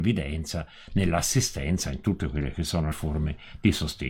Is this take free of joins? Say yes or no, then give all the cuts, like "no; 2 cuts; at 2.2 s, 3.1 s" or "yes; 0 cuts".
no; 1 cut; at 2.9 s